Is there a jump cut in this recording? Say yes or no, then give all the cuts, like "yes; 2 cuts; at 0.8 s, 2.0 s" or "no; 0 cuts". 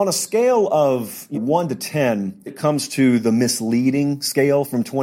yes; 2 cuts; at 1.3 s, 2.5 s